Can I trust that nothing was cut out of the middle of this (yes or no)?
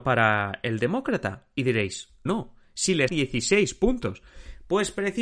no